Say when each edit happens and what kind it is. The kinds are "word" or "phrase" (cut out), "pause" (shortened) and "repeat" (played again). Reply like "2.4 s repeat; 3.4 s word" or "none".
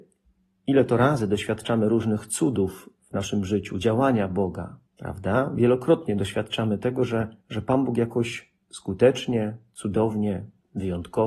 4.9 s pause; 7.4 s pause; 8.6 s pause